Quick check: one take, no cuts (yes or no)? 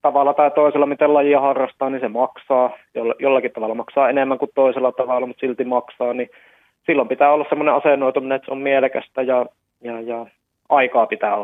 yes